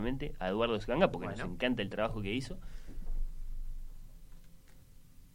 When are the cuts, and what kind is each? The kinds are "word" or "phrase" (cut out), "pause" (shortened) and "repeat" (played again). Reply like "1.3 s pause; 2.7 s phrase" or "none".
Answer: none